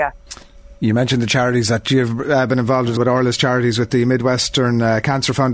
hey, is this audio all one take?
no; 1 cut; at 3.0 s

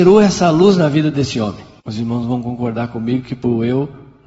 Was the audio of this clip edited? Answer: yes; 1 cut; at 1.8 s

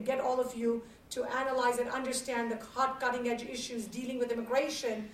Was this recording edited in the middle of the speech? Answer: no; 0 cuts

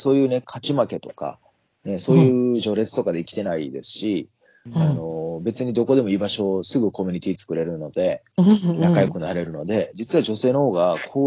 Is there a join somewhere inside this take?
no; 0 cuts

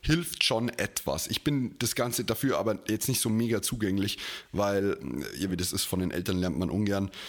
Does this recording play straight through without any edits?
no; 1 cut; at 5.5 s

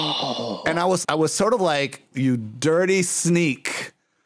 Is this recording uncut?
no; 2 cuts; at 1.0 s, 2.1 s

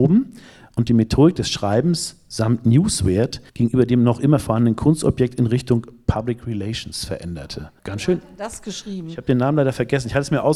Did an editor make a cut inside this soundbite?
yes; 2 cuts; at 3.5 s, 7.8 s

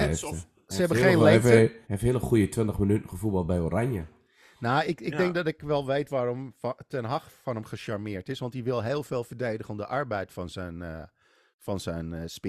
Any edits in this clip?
yes; 1 cut; at 1.8 s

